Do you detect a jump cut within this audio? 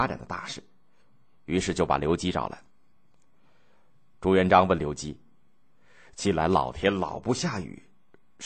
no; 0 cuts

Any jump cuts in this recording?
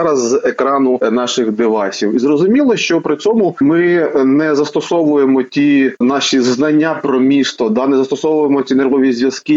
no; 0 cuts

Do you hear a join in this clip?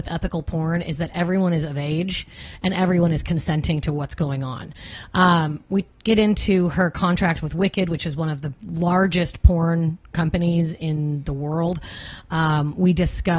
no; 0 cuts

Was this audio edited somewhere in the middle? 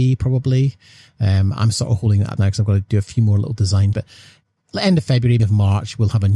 yes; 3 cuts; at 2.4 s, 3.9 s, 5.4 s

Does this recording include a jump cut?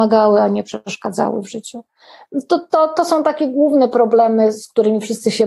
no; 0 cuts

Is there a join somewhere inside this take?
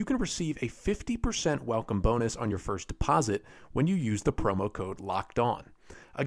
no; 0 cuts

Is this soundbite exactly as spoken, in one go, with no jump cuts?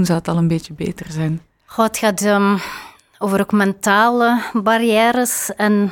yes; 0 cuts

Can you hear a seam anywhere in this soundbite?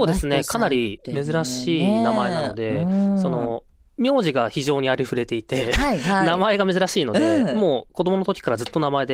no; 0 cuts

